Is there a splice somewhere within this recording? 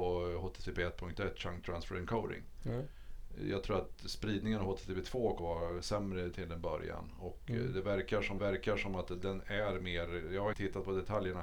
yes; 3 cuts; at 5.4 s, 8.4 s, 10.5 s

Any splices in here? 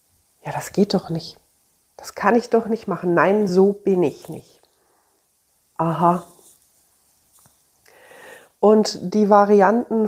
no; 0 cuts

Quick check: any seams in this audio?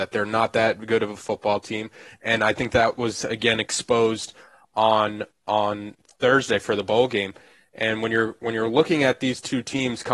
no; 0 cuts

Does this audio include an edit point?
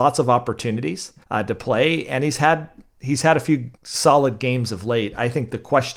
yes; 2 cuts; at 1.2 s, 3.8 s

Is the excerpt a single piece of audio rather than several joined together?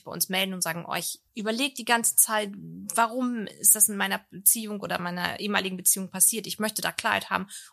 no; 1 cut; at 1.3 s

